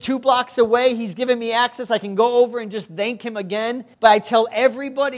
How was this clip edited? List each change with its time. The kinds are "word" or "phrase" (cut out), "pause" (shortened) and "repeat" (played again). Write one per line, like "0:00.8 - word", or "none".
0:03.9 - pause